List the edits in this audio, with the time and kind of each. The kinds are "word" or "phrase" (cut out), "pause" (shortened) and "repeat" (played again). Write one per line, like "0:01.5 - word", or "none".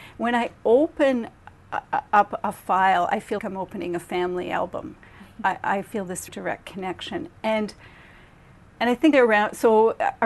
0:03.4 - word
0:06.3 - word
0:09.1 - word

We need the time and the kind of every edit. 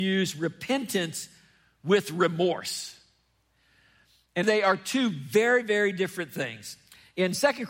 0:04.4 - word

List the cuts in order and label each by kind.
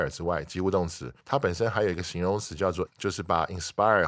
0:01.2 - pause
0:02.9 - word

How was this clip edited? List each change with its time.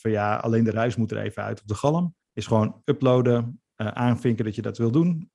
0:02.2 - pause

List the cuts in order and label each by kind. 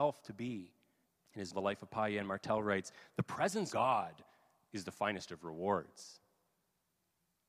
0:01.0 - pause
0:01.5 - word
0:03.7 - word

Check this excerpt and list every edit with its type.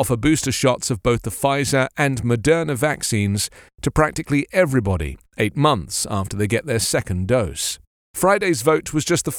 none

